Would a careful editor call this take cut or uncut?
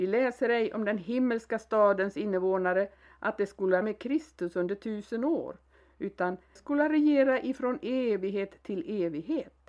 cut